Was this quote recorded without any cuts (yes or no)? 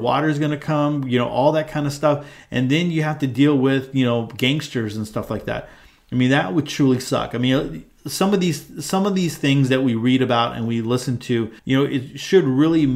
no